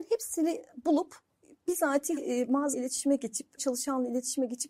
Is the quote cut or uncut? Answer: cut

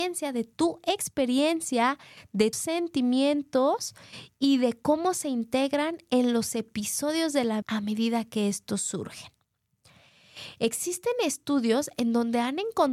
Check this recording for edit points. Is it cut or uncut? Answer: cut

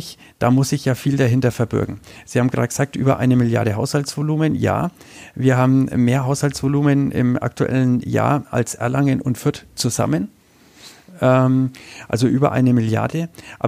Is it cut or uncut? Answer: uncut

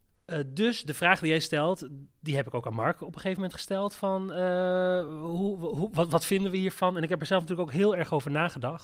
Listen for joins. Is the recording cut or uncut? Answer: uncut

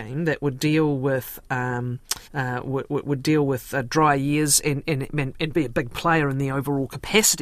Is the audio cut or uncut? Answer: cut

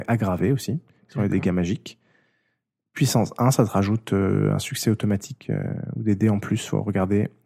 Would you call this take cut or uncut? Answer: uncut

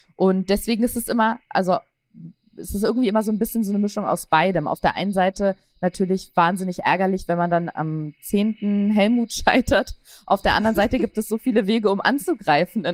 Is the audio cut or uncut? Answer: uncut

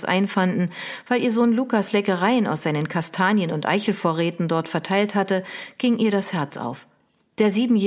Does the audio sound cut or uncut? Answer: uncut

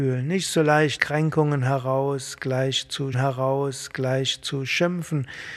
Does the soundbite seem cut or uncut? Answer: cut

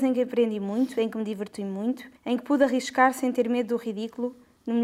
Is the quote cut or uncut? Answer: cut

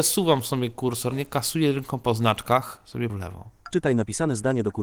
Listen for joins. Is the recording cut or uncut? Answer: cut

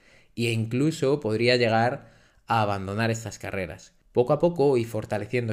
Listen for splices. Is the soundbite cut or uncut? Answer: cut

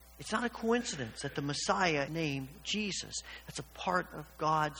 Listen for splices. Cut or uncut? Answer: cut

